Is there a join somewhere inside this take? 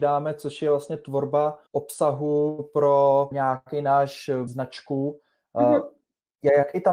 yes; 3 cuts; at 1.7 s, 3.3 s, 4.5 s

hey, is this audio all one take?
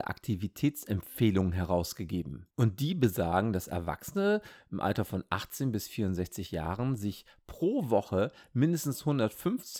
no; 1 cut; at 2.5 s

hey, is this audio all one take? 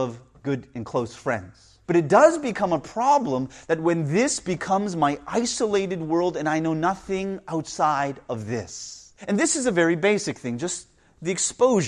no; 2 cuts; at 1.8 s, 9.2 s

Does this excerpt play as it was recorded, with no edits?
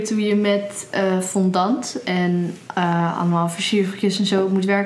yes; 0 cuts

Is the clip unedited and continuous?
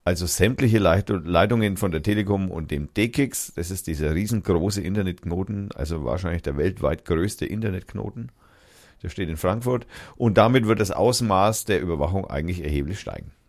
yes; 0 cuts

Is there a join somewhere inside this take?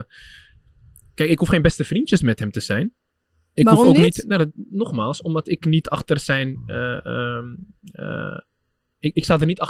no; 0 cuts

